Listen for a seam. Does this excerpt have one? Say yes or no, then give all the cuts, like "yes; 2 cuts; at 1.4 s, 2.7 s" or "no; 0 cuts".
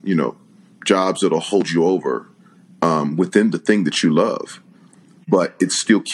no; 0 cuts